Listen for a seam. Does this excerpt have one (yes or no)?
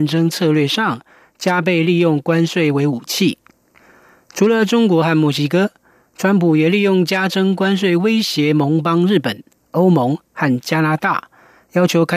no